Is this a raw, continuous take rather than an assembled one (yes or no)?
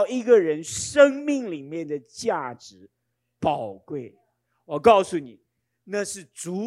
yes